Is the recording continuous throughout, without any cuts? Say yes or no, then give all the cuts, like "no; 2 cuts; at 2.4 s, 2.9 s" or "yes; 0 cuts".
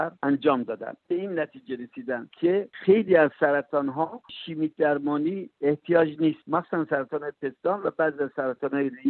yes; 0 cuts